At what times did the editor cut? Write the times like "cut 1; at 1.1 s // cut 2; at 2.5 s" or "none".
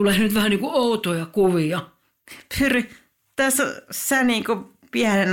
none

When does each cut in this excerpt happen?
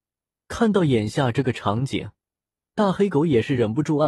none

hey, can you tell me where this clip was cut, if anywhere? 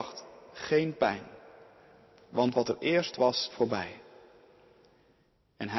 cut 1; at 3.5 s

